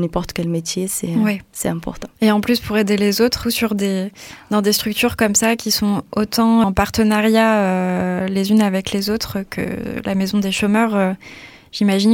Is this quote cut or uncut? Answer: cut